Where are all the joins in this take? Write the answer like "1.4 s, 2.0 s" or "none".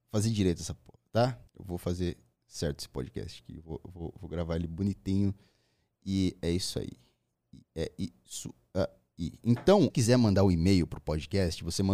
1.5 s, 9.9 s